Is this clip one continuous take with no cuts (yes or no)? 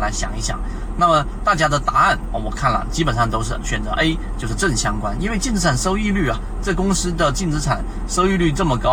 yes